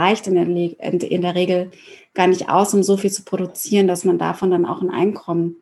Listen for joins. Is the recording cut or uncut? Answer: uncut